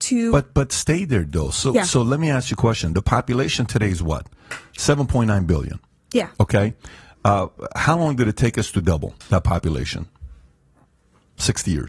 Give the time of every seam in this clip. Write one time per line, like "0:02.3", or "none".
none